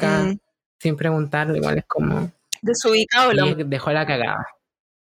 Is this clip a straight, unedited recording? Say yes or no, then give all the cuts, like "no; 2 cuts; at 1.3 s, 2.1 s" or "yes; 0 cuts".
no; 1 cut; at 3.5 s